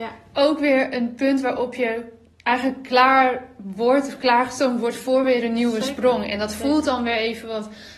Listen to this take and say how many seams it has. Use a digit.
0